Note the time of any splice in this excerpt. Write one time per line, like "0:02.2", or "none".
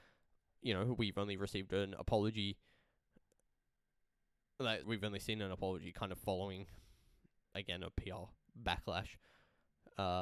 0:04.8
0:07.4